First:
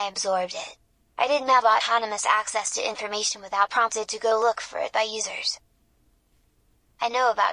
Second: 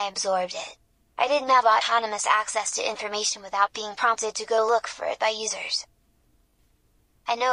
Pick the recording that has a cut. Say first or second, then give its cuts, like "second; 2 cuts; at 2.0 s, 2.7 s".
first; 1 cut; at 3.7 s